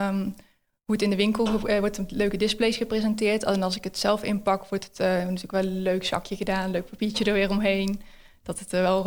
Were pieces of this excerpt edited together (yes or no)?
no